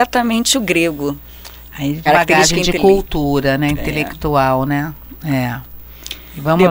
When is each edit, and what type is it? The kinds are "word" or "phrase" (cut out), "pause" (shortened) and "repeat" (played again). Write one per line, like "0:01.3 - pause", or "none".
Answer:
0:02.1 - phrase